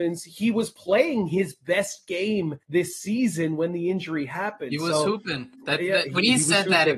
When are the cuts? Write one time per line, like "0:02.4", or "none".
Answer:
0:02.6
0:05.5

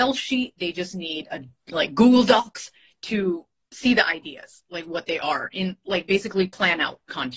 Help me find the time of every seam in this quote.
none

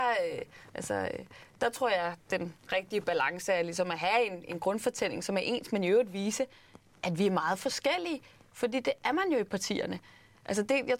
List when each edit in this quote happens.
none

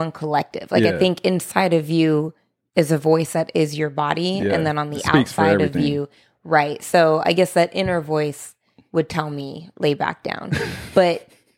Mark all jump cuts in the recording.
none

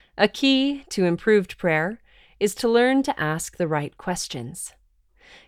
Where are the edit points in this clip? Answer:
none

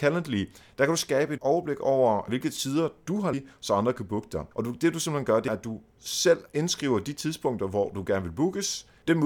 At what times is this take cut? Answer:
0:01.4
0:02.3
0:03.3
0:04.5
0:05.5
0:06.5

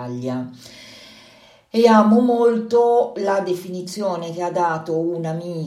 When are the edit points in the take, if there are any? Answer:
none

